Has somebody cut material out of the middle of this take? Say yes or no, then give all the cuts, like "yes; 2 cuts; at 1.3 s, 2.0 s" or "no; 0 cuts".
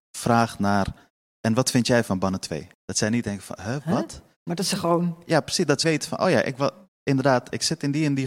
yes; 4 cuts; at 1.2 s, 2.1 s, 2.7 s, 5.8 s